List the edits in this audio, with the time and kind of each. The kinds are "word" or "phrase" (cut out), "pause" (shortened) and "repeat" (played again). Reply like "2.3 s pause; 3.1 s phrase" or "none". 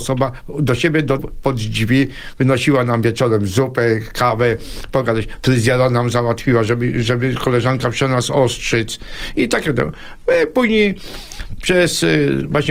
1.2 s phrase